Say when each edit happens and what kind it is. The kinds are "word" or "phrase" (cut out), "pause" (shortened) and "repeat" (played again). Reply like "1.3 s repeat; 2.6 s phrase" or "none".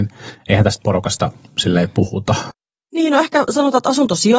none